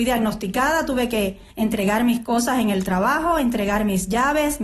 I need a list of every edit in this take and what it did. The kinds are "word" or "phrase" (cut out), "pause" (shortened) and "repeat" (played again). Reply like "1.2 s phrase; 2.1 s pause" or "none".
1.5 s pause